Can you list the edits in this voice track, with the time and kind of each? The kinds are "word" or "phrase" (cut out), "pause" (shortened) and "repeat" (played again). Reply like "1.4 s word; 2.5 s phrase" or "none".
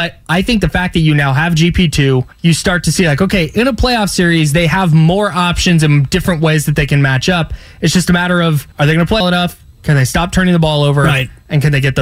2.3 s pause; 8.7 s pause; 9.2 s word